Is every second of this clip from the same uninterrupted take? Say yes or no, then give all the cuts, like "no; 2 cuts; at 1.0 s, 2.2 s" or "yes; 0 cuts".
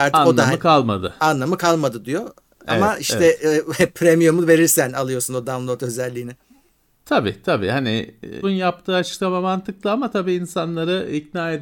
no; 1 cut; at 8.4 s